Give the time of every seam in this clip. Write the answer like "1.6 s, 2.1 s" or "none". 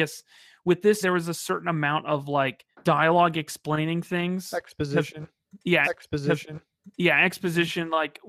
1.0 s, 2.7 s, 5.8 s